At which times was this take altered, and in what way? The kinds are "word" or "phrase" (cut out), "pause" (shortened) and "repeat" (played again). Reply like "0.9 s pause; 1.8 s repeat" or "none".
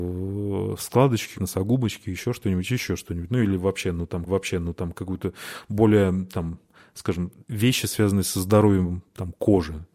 1.3 s word; 4.3 s repeat; 7.4 s pause